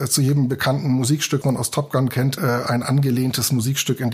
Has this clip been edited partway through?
yes; 2 cuts; at 1.4 s, 2.4 s

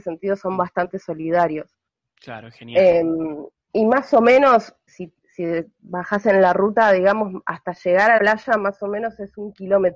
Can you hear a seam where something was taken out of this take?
yes; 5 cuts; at 1.9 s, 3.6 s, 4.9 s, 5.2 s, 8.2 s

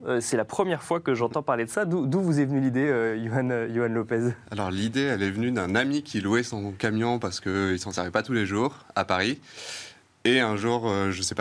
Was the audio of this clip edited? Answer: no; 0 cuts

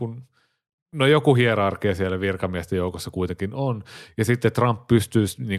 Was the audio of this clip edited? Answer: no; 0 cuts

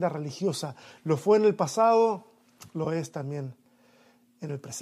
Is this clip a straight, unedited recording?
yes; 0 cuts

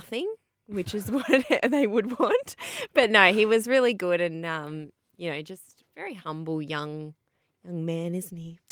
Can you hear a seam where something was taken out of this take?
no; 0 cuts

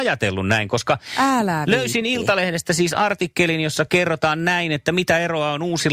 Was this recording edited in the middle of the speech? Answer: no; 0 cuts

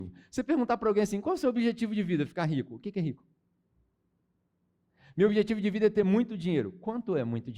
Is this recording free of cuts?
yes; 0 cuts

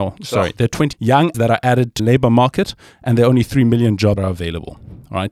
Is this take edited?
yes; 4 cuts; at 0.9 s, 1.3 s, 2.0 s, 4.2 s

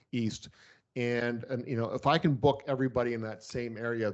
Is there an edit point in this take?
no; 0 cuts

